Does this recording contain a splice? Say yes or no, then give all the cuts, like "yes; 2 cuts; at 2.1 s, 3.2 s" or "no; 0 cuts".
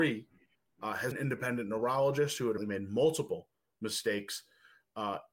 yes; 2 cuts; at 1.1 s, 2.6 s